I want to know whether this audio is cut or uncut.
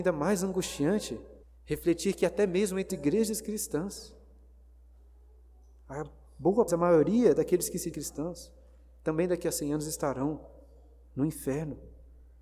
cut